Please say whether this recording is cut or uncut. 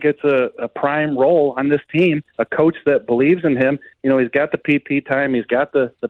cut